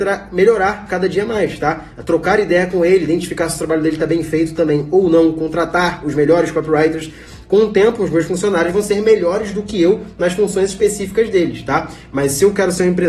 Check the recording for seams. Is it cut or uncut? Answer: uncut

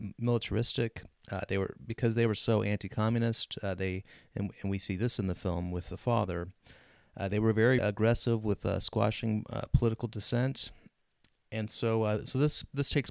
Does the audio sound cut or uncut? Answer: cut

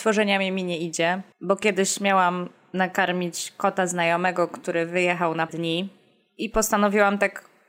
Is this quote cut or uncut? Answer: cut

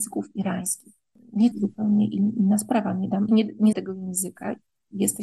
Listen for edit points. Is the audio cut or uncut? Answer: cut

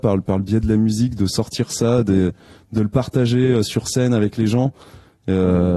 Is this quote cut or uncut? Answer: uncut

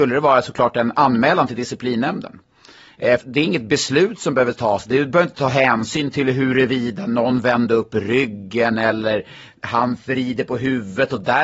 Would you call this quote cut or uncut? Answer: cut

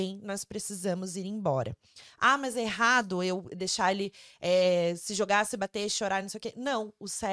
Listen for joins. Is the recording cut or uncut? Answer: uncut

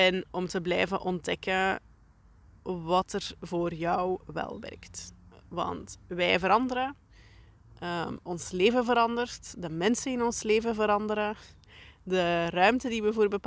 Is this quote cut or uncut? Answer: uncut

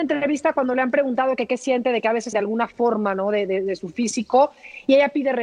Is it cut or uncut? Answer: cut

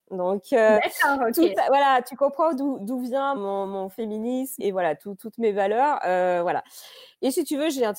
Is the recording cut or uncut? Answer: cut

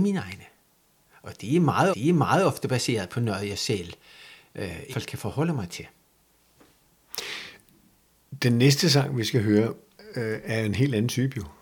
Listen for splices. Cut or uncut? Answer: cut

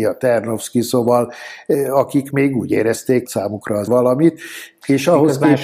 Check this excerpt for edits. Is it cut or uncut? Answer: cut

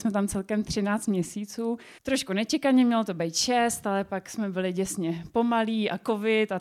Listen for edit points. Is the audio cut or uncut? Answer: cut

